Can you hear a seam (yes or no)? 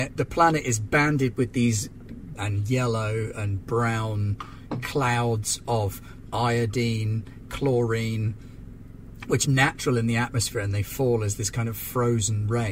yes